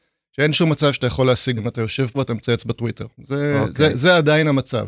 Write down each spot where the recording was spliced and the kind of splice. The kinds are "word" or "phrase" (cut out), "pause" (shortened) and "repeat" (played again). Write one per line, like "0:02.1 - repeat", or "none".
0:01.6 - word
0:02.1 - word
0:03.1 - pause